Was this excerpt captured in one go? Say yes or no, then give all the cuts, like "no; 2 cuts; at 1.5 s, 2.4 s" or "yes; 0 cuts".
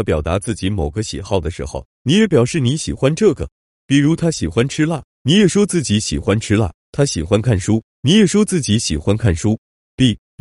yes; 0 cuts